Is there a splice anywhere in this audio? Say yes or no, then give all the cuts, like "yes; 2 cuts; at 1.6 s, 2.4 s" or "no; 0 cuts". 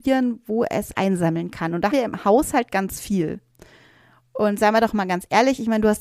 yes; 2 cuts; at 0.9 s, 1.9 s